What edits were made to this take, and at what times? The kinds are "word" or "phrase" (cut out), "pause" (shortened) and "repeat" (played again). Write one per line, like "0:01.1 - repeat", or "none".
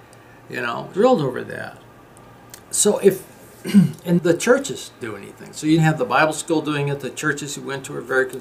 0:00.9 - word
0:02.6 - pause
0:04.2 - word
0:05.0 - word
0:05.8 - word